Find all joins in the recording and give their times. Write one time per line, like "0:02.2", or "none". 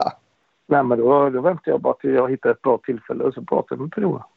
none